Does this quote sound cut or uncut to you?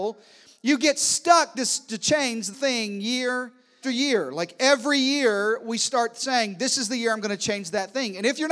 cut